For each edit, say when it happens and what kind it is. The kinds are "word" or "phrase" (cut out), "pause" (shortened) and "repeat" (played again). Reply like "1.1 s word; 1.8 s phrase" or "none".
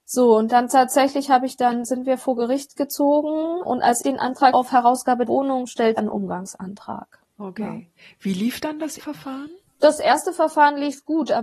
3.6 s word; 4.0 s word; 4.5 s word; 5.3 s word; 6.0 s word; 9.0 s word